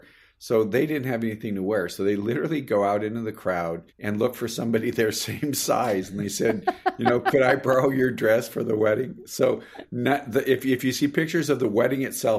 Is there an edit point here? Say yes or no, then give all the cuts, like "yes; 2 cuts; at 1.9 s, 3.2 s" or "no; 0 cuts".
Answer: yes; 1 cut; at 3.9 s